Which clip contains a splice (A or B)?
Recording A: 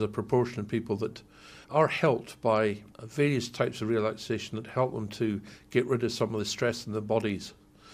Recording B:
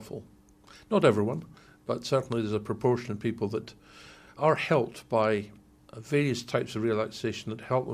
A